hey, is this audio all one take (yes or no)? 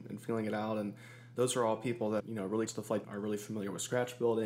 no